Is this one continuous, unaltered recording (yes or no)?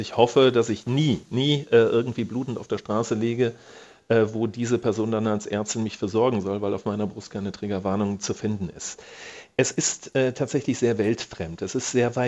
yes